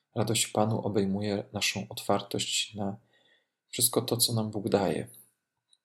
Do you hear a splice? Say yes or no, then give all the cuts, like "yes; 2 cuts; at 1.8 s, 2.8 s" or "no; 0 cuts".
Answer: no; 0 cuts